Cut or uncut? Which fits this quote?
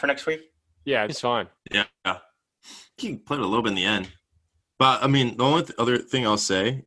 cut